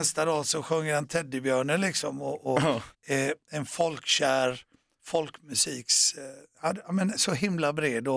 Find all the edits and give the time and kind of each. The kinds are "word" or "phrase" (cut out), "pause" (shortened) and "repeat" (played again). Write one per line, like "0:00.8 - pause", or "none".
0:02.9 - pause